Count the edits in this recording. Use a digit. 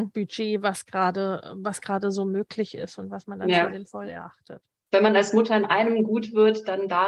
0